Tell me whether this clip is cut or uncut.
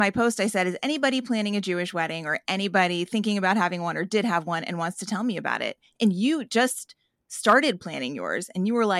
uncut